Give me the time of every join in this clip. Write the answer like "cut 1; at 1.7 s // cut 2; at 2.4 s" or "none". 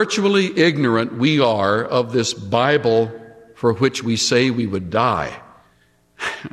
none